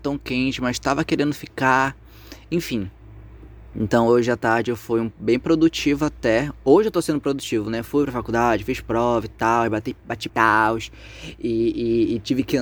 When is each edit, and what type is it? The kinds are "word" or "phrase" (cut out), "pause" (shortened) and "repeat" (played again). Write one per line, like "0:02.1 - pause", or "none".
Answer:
0:10.3 - phrase